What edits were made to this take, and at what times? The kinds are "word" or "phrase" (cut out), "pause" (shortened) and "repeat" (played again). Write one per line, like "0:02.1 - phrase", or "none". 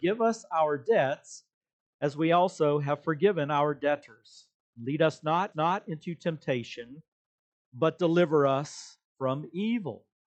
0:05.5 - repeat
0:09.1 - pause